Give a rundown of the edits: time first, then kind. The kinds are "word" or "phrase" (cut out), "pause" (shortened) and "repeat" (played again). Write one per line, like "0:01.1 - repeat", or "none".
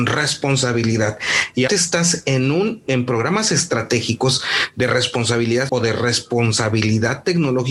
0:01.7 - word
0:02.9 - word
0:05.7 - word